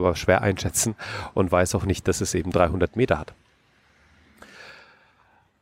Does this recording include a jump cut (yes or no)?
no